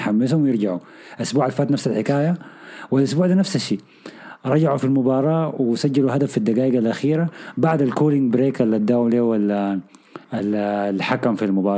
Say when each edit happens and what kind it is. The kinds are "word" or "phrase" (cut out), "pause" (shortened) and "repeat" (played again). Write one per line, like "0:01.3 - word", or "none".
0:10.2 - pause

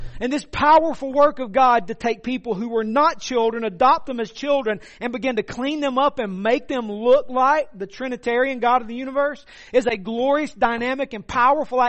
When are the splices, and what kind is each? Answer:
none

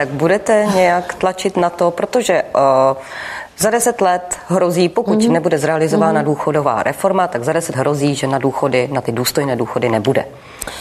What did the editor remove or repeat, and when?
0:07.7 - word

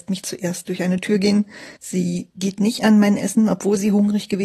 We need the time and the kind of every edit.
0:01.8 - pause

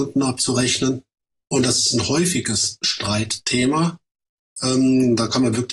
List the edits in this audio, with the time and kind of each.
none

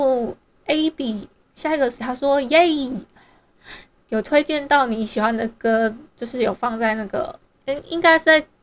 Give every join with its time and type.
0:02.0 - word
0:06.1 - pause

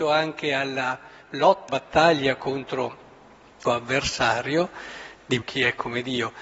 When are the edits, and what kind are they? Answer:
0:01.7 - word
0:03.6 - word
0:05.4 - word

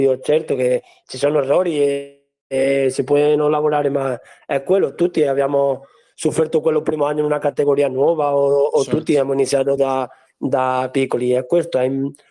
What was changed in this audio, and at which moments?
none

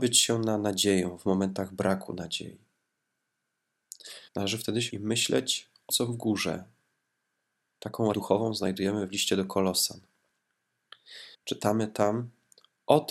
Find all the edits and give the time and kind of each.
0:04.3 - pause
0:04.9 - word
0:05.9 - word
0:08.1 - word
0:11.3 - pause

